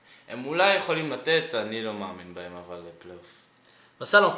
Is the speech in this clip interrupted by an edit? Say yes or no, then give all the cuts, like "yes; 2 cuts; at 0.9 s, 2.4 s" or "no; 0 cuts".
no; 0 cuts